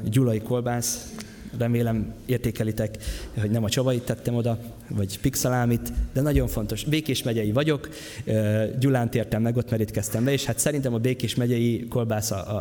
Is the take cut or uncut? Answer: uncut